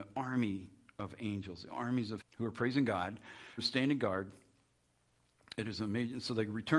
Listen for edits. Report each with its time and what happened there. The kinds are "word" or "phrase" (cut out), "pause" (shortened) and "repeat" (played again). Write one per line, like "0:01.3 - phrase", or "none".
0:02.2 - word
0:03.6 - word